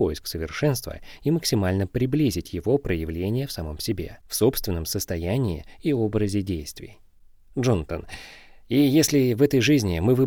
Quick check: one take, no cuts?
no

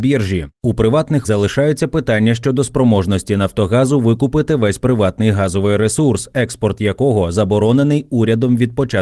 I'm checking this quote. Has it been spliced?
yes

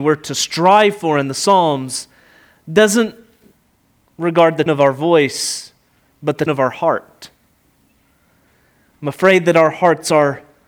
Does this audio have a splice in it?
yes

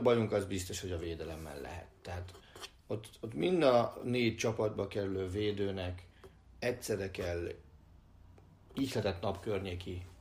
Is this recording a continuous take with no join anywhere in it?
yes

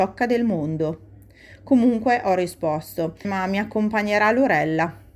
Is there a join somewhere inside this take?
yes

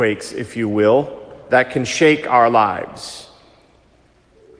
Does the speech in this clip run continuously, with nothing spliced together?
yes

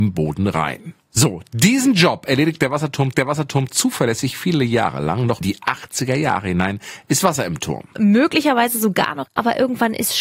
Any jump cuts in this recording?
yes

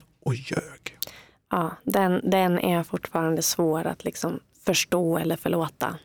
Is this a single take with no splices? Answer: yes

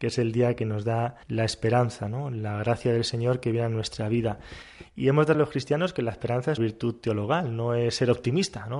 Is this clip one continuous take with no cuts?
no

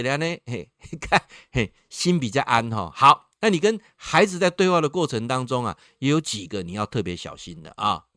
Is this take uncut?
yes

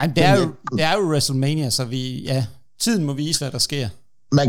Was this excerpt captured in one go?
yes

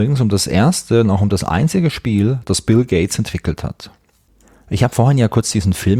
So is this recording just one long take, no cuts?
yes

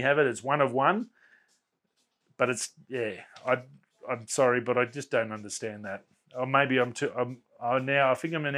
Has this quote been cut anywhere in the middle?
no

